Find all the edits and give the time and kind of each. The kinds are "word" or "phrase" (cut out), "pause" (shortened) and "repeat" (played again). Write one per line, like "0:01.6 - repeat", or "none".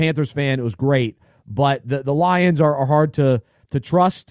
none